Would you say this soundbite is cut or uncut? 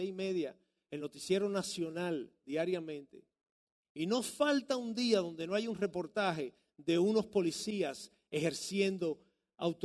uncut